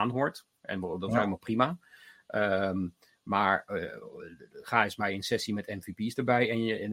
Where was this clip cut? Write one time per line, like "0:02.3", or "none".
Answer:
none